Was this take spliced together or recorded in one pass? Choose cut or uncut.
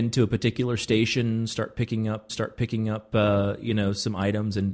cut